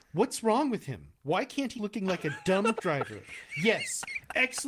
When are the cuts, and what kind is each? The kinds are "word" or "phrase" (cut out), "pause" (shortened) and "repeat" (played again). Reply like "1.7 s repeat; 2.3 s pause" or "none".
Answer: 1.2 s pause; 1.7 s word; 2.7 s word